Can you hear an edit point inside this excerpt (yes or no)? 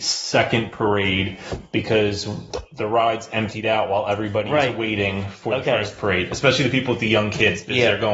no